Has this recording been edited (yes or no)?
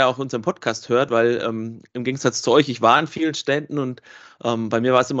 no